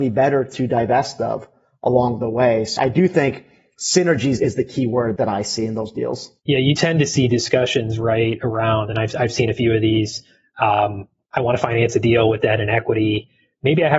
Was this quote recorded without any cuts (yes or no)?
no